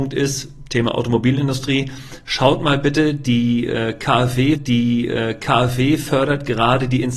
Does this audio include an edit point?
yes; 1 cut; at 4.6 s

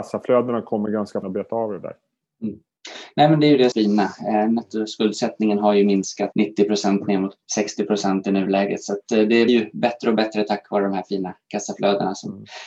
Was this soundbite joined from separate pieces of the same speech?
yes; 5 cuts; at 1.2 s, 3.7 s, 6.3 s, 7.4 s, 9.5 s

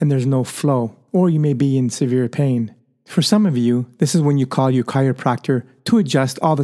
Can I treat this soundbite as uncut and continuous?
yes; 0 cuts

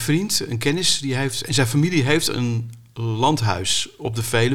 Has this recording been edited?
no; 0 cuts

